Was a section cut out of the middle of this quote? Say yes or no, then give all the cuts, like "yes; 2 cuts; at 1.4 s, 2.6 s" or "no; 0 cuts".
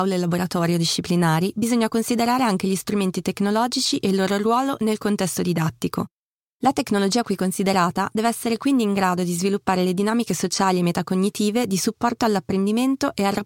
no; 0 cuts